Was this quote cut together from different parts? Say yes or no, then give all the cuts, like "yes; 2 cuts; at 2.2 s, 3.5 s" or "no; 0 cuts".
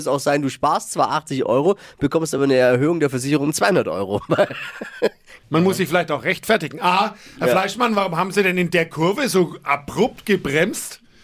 no; 0 cuts